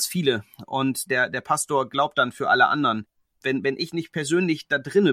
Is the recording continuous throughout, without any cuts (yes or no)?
no